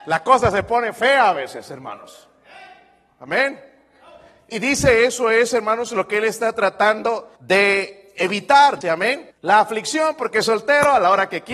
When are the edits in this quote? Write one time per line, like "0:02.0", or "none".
0:04.5
0:07.4
0:08.8
0:09.3